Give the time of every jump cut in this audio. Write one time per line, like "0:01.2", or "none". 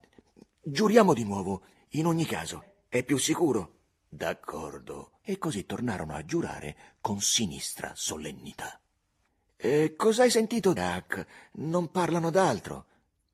0:05.2
0:10.8